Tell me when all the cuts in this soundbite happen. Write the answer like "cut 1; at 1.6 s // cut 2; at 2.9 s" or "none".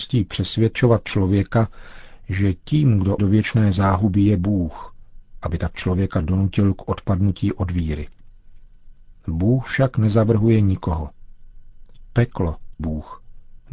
cut 1; at 3.2 s // cut 2; at 12.8 s